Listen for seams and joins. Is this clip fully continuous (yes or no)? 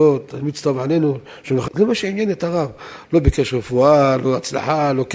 no